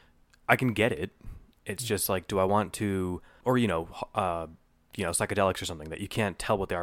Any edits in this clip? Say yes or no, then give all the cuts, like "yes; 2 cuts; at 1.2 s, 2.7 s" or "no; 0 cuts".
yes; 1 cut; at 3.4 s